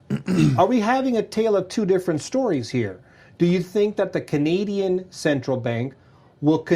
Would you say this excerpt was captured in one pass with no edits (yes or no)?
yes